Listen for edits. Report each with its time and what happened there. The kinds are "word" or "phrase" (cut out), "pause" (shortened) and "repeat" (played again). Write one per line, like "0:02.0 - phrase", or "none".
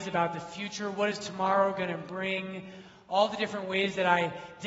none